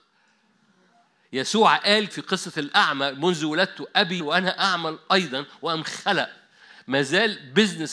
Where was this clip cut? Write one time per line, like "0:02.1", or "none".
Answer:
0:02.1
0:04.2